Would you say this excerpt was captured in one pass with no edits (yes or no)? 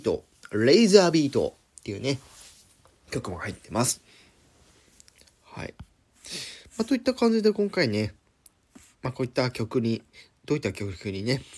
yes